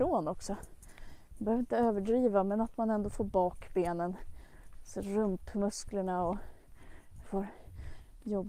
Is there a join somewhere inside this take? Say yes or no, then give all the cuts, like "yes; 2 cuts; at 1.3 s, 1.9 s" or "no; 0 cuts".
yes; 1 cut; at 7.2 s